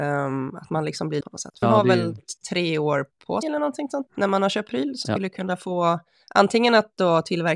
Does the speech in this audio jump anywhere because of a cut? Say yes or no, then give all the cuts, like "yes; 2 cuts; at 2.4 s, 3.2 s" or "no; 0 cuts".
yes; 6 cuts; at 1.2 s, 1.6 s, 3.4 s, 4.1 s, 4.7 s, 5.0 s